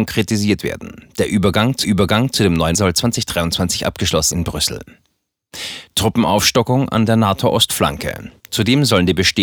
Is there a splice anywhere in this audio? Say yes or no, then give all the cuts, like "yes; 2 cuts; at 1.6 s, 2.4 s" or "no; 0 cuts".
yes; 4 cuts; at 1.8 s, 2.7 s, 4.3 s, 8.4 s